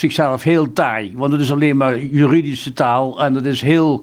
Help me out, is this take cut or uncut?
uncut